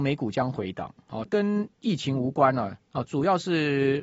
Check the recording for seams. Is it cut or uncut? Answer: cut